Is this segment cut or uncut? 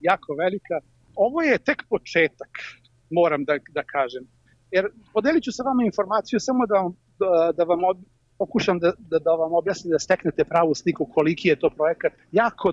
uncut